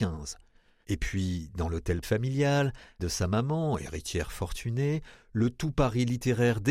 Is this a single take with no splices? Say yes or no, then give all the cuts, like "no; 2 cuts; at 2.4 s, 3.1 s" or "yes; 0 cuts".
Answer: no; 2 cuts; at 2.0 s, 3.0 s